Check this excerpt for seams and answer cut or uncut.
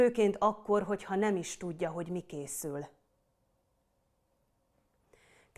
uncut